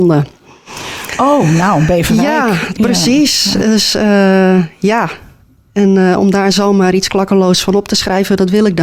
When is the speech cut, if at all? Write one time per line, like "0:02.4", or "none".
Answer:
none